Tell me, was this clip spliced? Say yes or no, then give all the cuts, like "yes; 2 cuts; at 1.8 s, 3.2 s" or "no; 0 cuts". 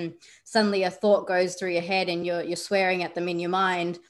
no; 0 cuts